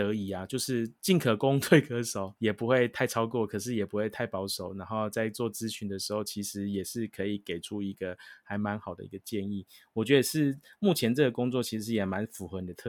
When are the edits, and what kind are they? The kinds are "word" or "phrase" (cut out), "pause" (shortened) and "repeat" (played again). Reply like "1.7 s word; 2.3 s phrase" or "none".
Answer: none